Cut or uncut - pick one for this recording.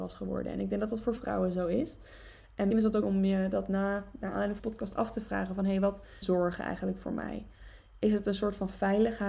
cut